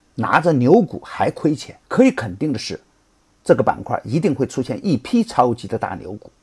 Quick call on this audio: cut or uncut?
cut